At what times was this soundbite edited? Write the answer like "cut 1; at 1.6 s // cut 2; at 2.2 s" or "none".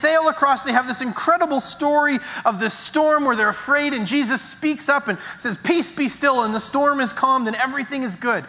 none

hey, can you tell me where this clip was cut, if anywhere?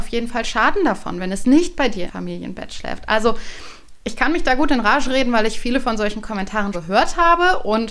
cut 1; at 2.1 s // cut 2; at 4.0 s // cut 3; at 6.7 s

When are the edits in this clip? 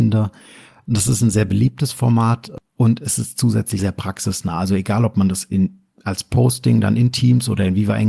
cut 1; at 2.6 s // cut 2; at 3.8 s

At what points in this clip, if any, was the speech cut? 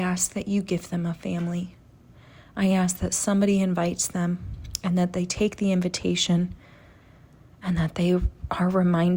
none

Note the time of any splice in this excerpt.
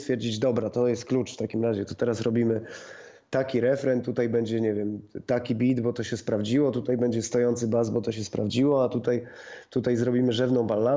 none

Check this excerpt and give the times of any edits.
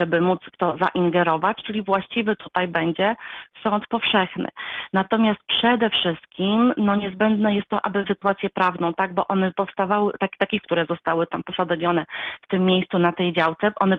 cut 1; at 8.0 s // cut 2; at 10.6 s

